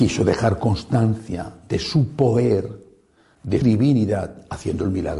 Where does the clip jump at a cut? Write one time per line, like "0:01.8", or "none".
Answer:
0:03.6